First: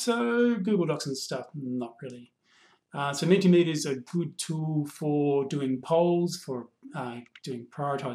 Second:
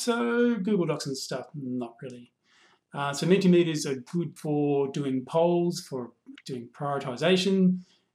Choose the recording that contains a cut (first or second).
second